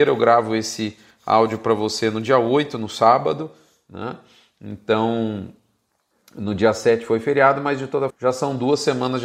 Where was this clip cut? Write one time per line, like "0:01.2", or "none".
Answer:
0:08.1